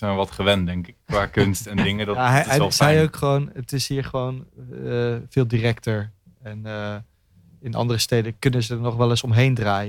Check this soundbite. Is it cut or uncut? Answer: uncut